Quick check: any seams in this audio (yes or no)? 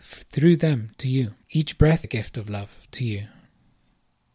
yes